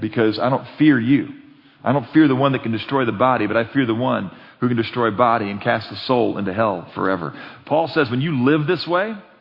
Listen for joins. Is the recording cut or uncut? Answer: uncut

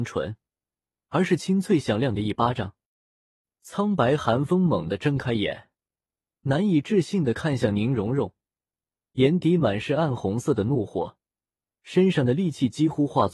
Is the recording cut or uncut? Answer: uncut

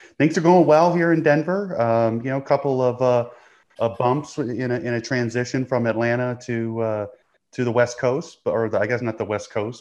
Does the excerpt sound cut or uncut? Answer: uncut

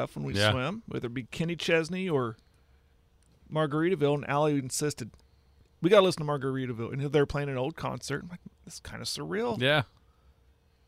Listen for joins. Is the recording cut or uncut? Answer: uncut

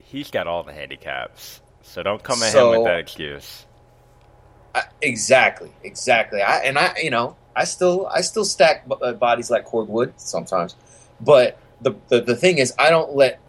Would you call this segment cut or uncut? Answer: uncut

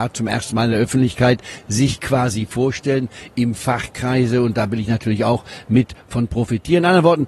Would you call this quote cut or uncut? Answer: uncut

